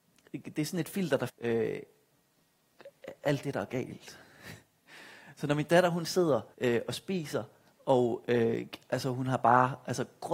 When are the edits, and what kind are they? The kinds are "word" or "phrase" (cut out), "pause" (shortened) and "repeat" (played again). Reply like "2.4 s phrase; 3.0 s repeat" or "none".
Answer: 1.3 s word; 6.5 s pause

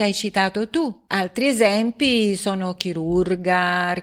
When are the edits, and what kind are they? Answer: none

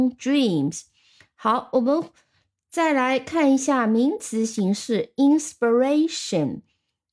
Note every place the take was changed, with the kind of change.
none

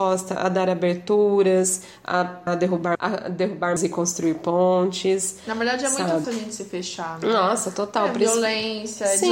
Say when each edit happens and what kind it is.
2.5 s phrase; 2.9 s word; 3.8 s word; 6.2 s word

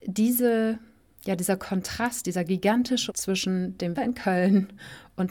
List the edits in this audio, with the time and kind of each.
3.1 s word; 3.9 s word

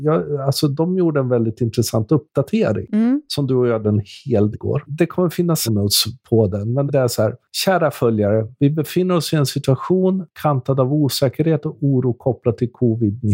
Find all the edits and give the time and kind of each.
3.8 s word; 4.5 s word; 5.7 s phrase; 6.9 s word

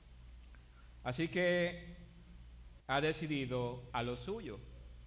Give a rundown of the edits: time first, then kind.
2.8 s word; 3.9 s word

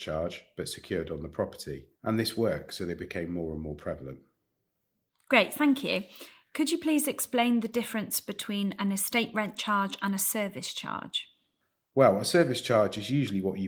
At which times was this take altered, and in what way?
1.9 s pause

